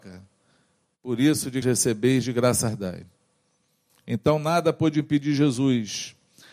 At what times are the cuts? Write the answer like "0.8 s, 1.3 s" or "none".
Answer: 1.6 s

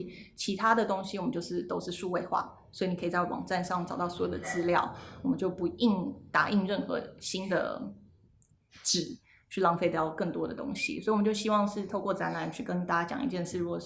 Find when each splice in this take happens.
none

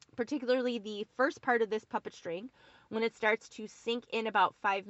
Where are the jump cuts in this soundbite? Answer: none

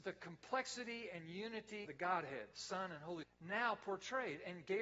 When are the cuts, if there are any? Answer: 1.8 s, 2.5 s, 3.2 s

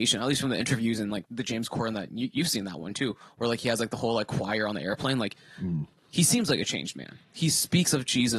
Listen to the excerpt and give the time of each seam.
7.2 s

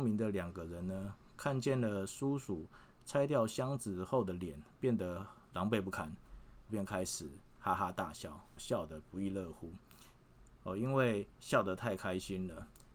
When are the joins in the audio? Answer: 6.7 s, 8.6 s, 11.3 s

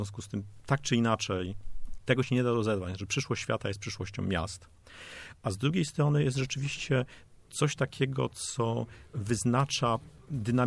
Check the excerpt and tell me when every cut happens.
none

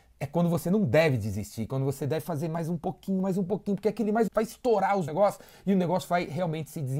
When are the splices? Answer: 4.3 s, 5.1 s

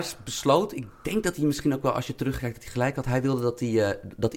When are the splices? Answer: none

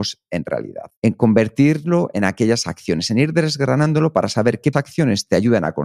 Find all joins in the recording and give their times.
1.0 s, 4.7 s

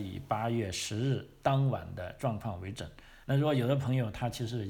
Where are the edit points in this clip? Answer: 3.2 s

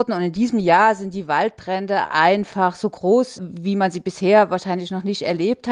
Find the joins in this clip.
3.4 s

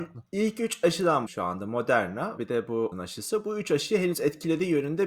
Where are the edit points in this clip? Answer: 1.3 s, 2.4 s, 2.9 s

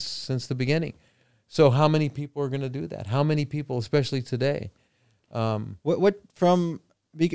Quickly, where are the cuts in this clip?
none

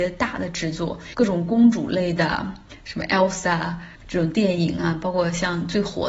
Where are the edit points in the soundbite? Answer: none

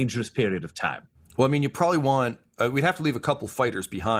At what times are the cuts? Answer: none

